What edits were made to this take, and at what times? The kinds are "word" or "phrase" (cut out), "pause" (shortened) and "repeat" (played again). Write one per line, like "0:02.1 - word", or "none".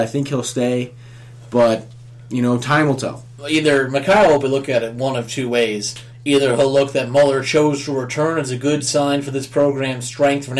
0:04.4 - word